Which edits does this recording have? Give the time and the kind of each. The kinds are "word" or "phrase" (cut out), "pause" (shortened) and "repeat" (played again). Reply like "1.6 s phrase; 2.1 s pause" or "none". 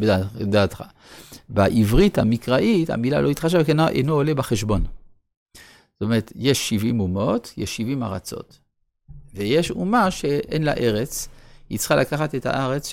none